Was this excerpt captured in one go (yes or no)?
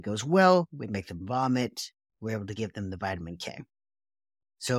yes